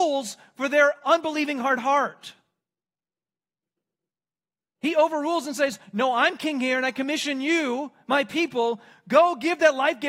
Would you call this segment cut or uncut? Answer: uncut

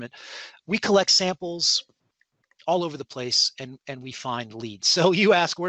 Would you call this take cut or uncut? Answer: uncut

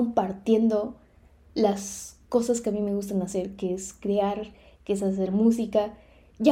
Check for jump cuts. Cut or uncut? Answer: uncut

